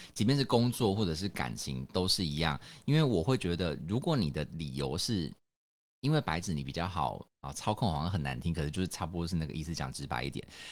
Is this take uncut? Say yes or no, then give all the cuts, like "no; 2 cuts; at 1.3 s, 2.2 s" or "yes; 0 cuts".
yes; 0 cuts